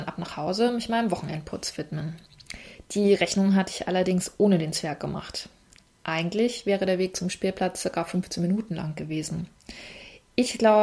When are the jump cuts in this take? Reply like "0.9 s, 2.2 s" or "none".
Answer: none